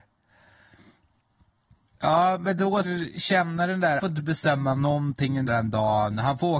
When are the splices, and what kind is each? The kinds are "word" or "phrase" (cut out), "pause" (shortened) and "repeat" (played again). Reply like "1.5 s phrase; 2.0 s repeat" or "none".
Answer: 2.8 s word; 4.0 s word; 5.5 s word